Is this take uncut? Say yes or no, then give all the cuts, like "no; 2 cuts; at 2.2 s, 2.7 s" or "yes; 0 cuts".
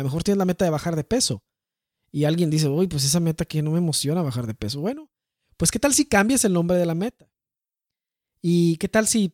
yes; 0 cuts